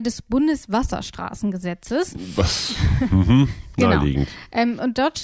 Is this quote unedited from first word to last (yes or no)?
yes